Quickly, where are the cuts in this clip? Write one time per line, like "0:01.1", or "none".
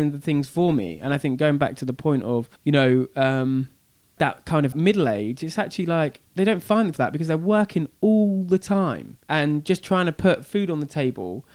0:02.6
0:04.2
0:04.7
0:06.3
0:06.9
0:09.2